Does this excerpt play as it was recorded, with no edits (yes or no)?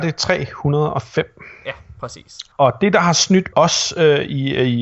no